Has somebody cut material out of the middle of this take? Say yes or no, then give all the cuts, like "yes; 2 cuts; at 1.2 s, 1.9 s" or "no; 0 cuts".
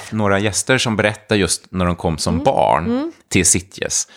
no; 0 cuts